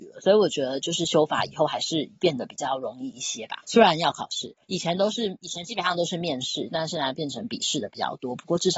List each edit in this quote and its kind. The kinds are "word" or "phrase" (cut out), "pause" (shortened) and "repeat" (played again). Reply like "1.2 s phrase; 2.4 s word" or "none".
3.6 s pause; 4.6 s pause